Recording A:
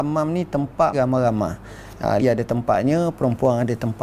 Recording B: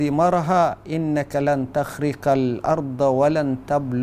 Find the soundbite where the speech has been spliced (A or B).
A